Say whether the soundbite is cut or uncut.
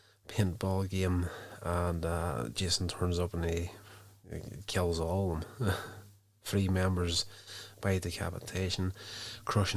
uncut